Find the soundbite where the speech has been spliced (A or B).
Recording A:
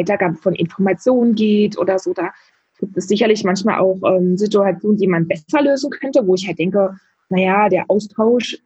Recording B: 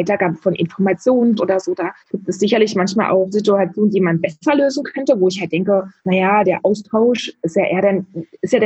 B